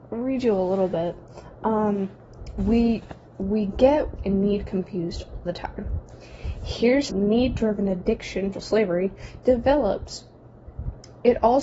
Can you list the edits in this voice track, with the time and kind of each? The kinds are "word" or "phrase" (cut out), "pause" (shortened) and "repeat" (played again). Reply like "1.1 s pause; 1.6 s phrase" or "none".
3.3 s pause; 4.2 s word; 5.5 s word; 7.1 s word; 8.5 s word

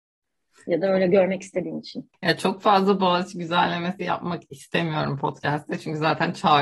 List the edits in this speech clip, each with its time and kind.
none

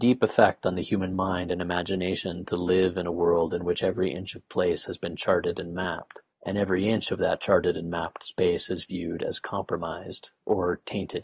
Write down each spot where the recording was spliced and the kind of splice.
none

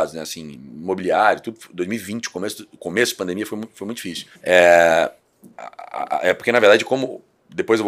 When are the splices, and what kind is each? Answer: 4.4 s pause

